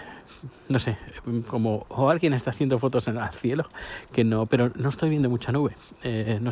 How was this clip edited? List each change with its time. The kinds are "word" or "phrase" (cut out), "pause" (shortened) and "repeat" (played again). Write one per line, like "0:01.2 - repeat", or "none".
none